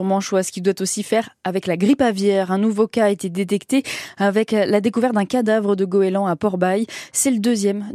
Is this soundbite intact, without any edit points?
yes; 0 cuts

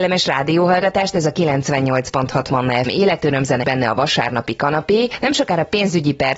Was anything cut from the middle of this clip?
yes; 2 cuts; at 2.9 s, 3.6 s

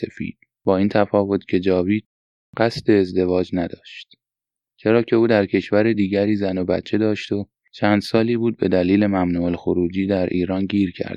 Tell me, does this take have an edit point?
no; 0 cuts

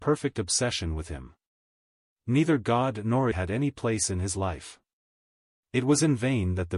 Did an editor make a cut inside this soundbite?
yes; 1 cut; at 3.3 s

